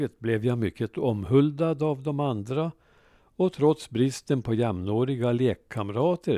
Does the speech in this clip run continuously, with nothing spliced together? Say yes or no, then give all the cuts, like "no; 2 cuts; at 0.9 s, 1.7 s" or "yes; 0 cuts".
yes; 0 cuts